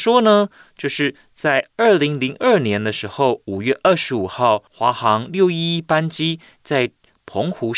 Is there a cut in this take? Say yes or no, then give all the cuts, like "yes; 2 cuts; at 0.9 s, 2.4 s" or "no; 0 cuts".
yes; 1 cut; at 4.7 s